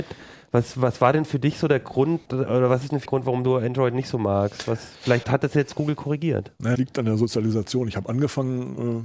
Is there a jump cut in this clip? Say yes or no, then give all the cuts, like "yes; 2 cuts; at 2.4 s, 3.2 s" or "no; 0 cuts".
yes; 4 cuts; at 2.3 s, 3.1 s, 5.2 s, 6.8 s